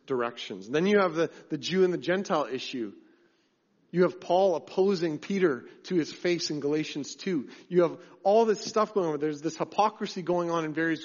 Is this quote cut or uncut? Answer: uncut